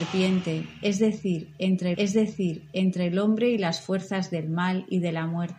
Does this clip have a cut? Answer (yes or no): yes